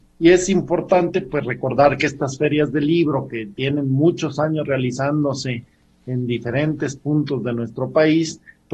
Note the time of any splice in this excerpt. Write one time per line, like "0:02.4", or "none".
none

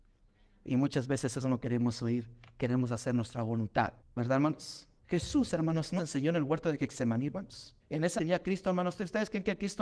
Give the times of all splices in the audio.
0:04.0
0:05.0
0:06.0
0:07.8
0:08.2

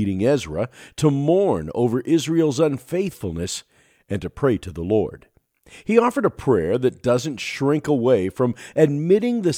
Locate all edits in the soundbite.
none

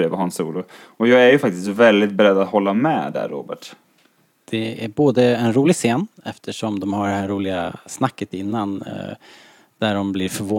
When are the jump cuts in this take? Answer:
0:06.1

